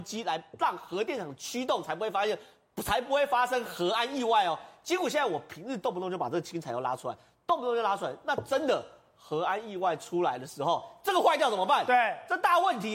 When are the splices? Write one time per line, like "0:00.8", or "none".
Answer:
none